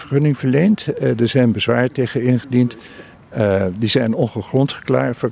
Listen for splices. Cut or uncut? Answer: uncut